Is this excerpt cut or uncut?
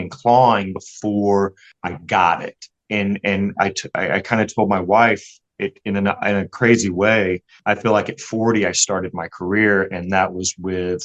uncut